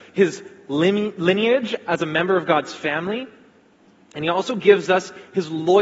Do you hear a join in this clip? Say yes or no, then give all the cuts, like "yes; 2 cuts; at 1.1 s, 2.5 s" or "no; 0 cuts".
no; 0 cuts